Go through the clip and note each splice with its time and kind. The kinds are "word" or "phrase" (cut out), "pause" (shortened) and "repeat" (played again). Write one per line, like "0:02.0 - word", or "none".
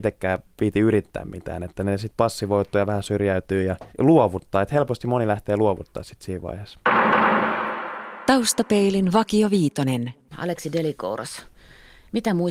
0:03.9 - pause